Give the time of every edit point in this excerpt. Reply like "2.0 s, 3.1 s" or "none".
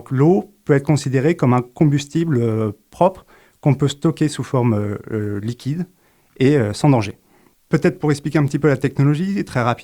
none